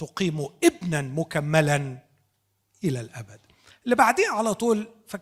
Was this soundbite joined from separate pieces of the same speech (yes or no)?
no